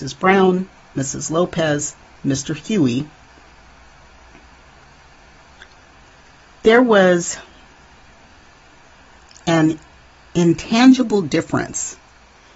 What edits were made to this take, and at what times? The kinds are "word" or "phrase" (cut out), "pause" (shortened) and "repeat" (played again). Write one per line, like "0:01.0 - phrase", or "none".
none